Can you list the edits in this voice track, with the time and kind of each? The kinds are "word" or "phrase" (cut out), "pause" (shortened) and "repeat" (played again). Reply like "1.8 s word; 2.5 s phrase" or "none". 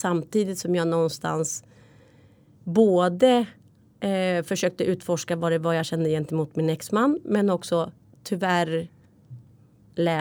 none